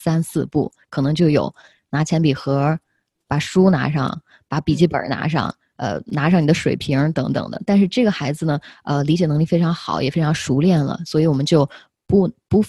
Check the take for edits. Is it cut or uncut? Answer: uncut